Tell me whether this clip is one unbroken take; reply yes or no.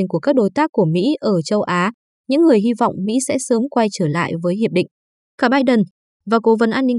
yes